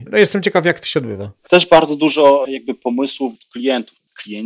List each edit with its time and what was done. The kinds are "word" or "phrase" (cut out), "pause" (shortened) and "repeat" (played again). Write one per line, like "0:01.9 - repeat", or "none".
0:01.4 - pause
0:03.3 - word